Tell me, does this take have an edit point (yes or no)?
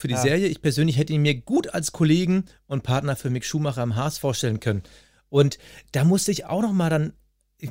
no